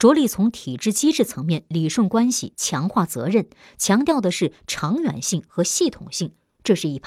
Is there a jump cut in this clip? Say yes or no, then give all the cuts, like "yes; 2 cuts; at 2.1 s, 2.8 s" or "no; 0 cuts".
no; 0 cuts